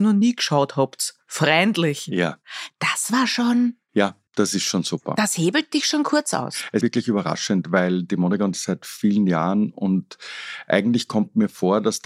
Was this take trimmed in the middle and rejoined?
yes; 3 cuts; at 4.3 s, 6.8 s, 8.5 s

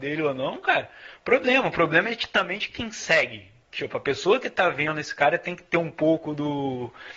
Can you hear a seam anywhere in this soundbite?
no; 0 cuts

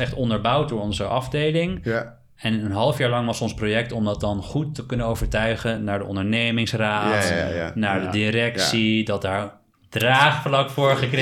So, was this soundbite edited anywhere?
no; 0 cuts

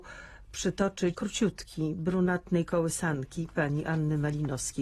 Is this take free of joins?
no; 1 cut; at 1.1 s

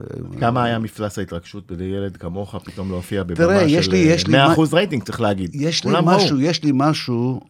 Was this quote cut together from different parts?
no; 0 cuts

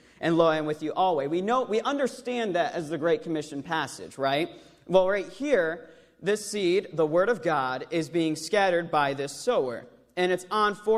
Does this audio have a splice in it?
no; 0 cuts

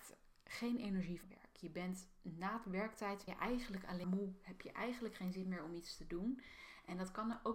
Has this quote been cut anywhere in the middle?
yes; 3 cuts; at 1.2 s, 3.3 s, 4.0 s

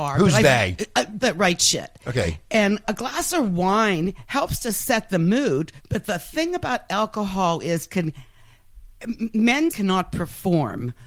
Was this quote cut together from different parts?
yes; 4 cuts; at 1.2 s, 2.8 s, 5.8 s, 9.7 s

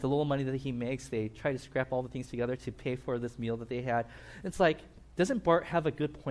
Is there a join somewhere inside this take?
no; 0 cuts

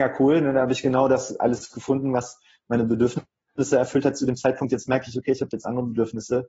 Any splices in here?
no; 0 cuts

